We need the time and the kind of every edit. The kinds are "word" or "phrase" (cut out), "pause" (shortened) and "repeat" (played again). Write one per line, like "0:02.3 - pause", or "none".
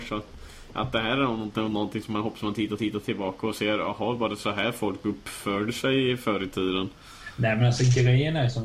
0:02.8 - repeat